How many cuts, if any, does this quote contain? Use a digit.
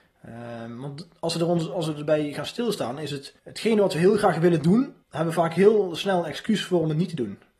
2